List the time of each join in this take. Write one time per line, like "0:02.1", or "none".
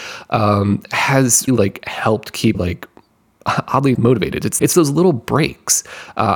0:01.5
0:02.5
0:03.9
0:04.6